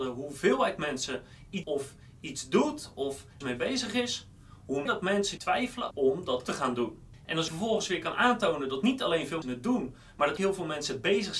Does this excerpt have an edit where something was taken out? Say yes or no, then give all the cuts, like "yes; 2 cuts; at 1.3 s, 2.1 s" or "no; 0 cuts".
yes; 9 cuts; at 1.6 s, 3.4 s, 4.9 s, 5.4 s, 5.9 s, 6.4 s, 7.5 s, 9.4 s, 10.4 s